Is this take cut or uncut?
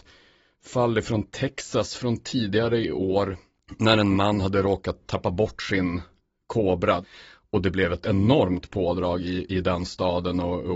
uncut